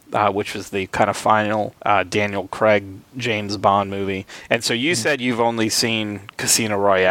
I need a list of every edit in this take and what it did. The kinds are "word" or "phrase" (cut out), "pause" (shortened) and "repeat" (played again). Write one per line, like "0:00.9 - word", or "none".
0:01.8 - pause